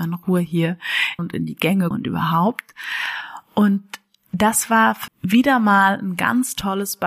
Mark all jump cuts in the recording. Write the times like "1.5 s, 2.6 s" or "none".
1.2 s, 1.9 s, 5.1 s